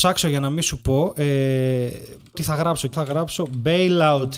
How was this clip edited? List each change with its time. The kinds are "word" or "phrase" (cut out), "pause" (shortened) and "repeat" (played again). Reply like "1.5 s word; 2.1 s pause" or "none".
2.3 s phrase; 2.9 s word